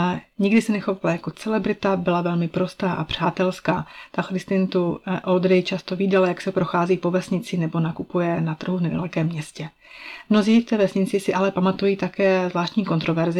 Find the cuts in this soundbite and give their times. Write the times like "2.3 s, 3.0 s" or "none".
none